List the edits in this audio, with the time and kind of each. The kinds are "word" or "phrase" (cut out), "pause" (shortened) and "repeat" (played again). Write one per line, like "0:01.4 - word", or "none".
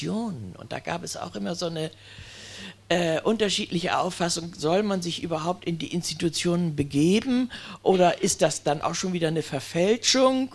0:08.8 - word